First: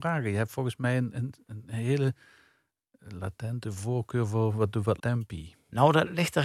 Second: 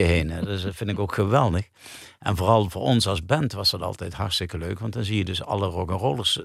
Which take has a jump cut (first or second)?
first